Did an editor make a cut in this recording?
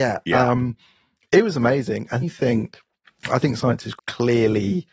yes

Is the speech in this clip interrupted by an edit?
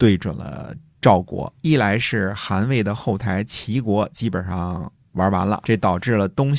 yes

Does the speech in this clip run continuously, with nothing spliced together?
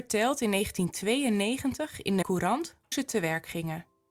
no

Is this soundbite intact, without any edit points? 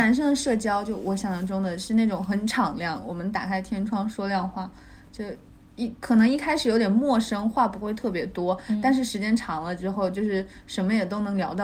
yes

